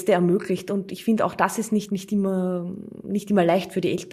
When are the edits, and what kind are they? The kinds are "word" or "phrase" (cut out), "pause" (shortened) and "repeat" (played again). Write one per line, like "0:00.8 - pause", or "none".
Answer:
0:01.9 - word

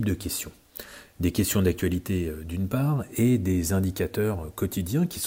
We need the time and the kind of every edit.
none

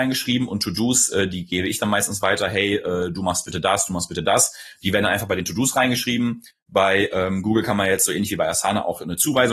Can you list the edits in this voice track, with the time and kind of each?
none

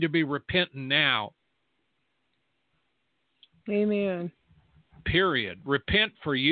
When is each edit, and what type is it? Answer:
none

